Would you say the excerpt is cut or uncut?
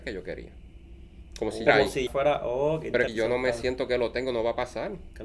cut